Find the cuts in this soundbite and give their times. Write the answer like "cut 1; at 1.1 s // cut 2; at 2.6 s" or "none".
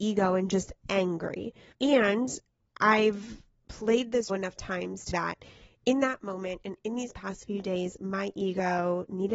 cut 1; at 1.7 s // cut 2; at 4.3 s // cut 3; at 5.1 s